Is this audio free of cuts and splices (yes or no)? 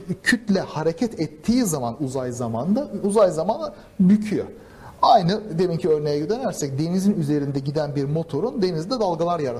yes